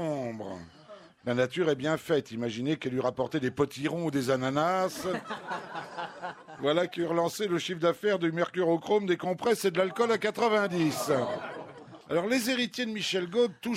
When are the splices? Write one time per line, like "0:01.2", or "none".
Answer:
0:12.0